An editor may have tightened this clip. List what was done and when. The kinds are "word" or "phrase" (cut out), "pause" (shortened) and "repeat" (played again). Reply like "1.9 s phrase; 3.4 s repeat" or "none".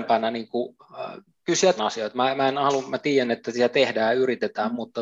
1.3 s pause; 1.8 s word